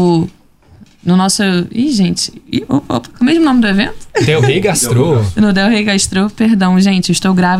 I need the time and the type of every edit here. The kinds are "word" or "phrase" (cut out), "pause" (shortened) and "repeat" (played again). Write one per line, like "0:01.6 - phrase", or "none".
none